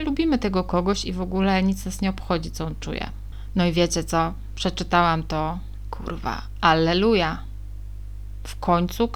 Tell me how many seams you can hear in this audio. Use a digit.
1